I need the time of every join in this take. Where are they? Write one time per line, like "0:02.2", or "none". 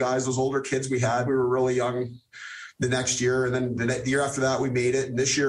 0:01.3